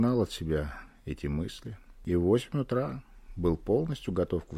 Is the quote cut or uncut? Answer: uncut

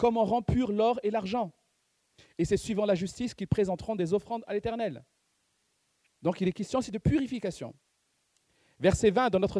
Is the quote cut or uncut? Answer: uncut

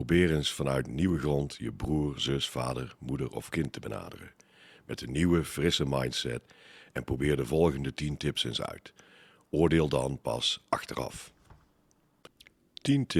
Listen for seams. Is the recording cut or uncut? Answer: uncut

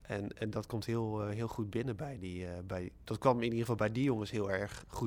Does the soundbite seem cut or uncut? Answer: uncut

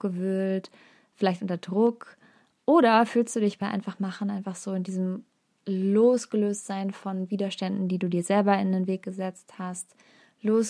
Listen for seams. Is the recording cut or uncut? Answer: uncut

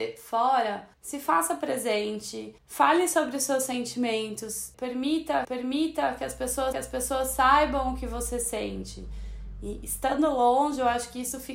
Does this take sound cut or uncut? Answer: cut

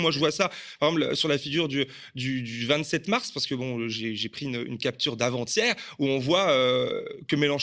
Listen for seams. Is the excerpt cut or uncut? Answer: uncut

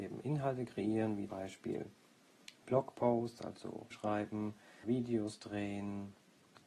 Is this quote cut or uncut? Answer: cut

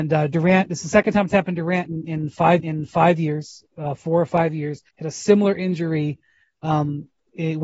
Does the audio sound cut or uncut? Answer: cut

